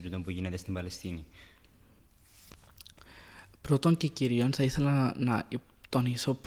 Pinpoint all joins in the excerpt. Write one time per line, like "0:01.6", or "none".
none